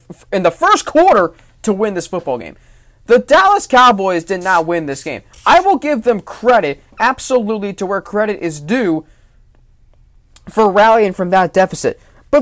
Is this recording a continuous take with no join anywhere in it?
yes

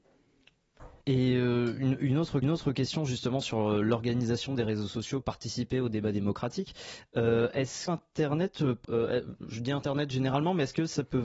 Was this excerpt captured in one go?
no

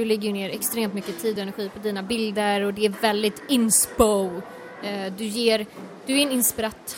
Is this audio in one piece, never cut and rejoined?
yes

